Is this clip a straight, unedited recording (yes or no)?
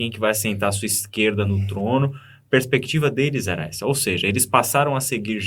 yes